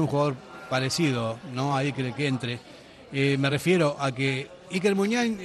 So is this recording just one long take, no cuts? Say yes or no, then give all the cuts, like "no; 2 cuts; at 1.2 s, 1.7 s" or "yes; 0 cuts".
yes; 0 cuts